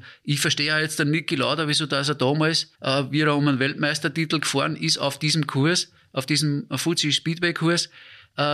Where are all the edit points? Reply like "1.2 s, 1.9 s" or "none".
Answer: 2.8 s